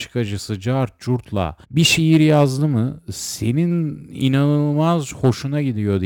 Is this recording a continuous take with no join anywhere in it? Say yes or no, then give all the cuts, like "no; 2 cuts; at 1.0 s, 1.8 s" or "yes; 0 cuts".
no; 1 cut; at 1.6 s